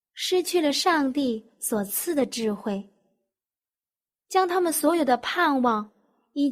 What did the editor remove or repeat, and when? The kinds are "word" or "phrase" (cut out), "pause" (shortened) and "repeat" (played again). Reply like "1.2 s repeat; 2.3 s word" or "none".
none